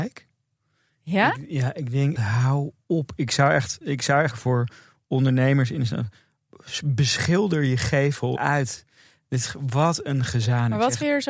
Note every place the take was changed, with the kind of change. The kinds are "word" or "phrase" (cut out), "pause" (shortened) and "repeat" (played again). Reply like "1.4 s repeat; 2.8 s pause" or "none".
2.2 s word; 3.3 s word; 3.8 s word; 4.3 s phrase; 8.4 s phrase